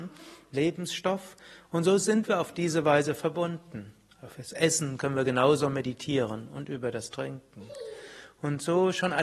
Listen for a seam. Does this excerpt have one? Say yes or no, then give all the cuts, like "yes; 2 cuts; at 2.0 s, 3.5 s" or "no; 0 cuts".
no; 0 cuts